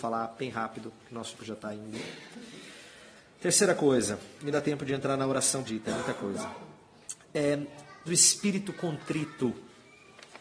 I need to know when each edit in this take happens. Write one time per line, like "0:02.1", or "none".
0:01.4
0:04.5
0:05.6
0:08.1